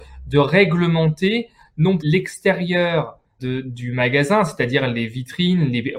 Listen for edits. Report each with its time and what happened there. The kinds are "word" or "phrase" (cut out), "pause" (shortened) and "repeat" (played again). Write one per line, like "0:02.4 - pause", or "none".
0:02.0 - word
0:03.4 - word